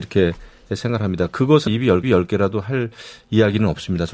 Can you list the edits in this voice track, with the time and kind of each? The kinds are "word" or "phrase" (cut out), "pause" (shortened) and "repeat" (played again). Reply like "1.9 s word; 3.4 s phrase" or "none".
1.7 s word; 2.0 s repeat